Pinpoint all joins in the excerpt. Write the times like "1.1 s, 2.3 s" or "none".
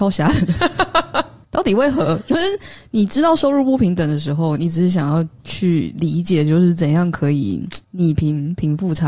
7.8 s